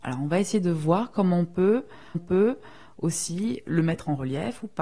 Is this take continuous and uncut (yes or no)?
no